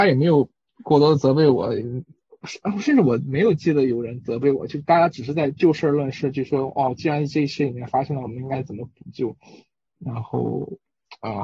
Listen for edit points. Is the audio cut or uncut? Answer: uncut